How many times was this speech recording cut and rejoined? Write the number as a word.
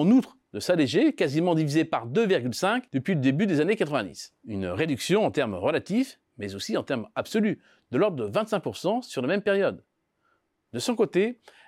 three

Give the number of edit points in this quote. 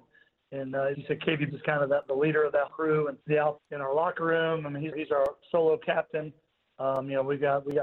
six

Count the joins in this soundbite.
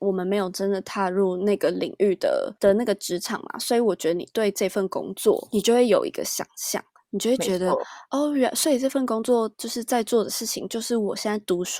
zero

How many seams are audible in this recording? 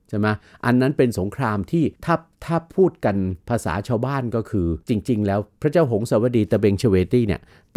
three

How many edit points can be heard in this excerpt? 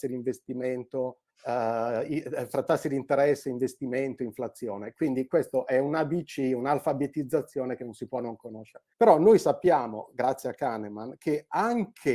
two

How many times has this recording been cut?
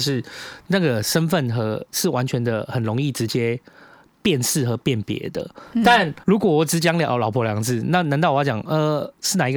one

